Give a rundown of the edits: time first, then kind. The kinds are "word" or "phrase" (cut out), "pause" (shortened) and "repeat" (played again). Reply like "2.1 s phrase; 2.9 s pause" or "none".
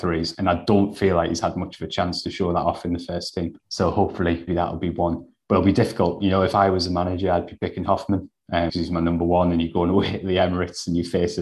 3.6 s pause; 4.5 s word; 8.7 s word

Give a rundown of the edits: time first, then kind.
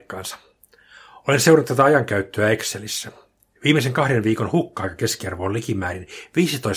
none

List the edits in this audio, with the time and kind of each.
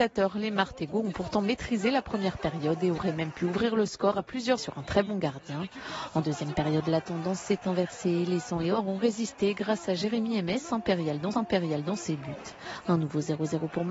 4.6 s phrase; 11.3 s repeat

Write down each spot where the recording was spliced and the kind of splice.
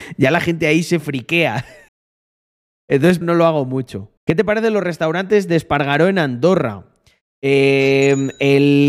1.9 s pause; 3.2 s phrase; 4.2 s pause

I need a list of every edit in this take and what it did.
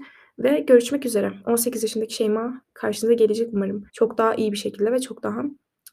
3.9 s pause

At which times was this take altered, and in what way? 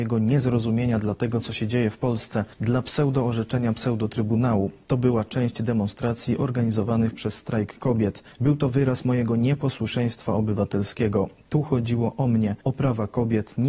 2.5 s pause; 8.3 s pause; 12.6 s pause

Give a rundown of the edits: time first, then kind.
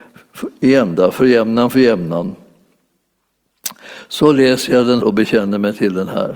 5.0 s word

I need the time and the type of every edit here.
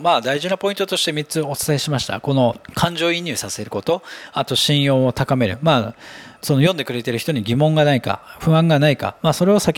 2.6 s pause; 6.4 s pause

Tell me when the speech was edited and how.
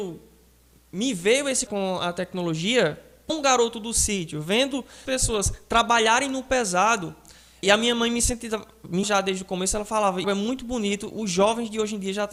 1.7 s word; 3.3 s word; 5.1 s word; 7.6 s word; 9.0 s word; 10.2 s word

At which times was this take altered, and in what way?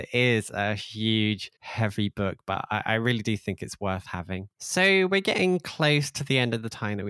1.6 s pause; 4.5 s pause

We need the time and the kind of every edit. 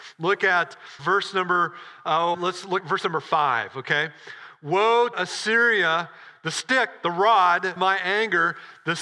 1.0 s word; 2.3 s word; 2.8 s word; 5.1 s word; 7.8 s word

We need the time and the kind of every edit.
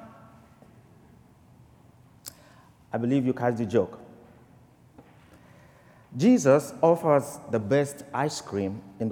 none

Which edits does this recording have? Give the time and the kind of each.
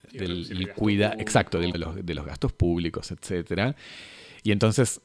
1.7 s word

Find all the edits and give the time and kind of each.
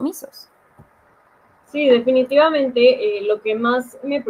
none

